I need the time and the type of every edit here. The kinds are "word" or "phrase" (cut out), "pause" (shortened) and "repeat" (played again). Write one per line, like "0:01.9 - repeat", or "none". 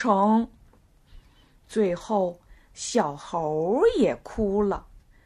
none